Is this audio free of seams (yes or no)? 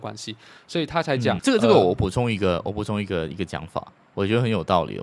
no